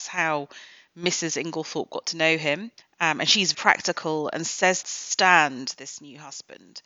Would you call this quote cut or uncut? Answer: cut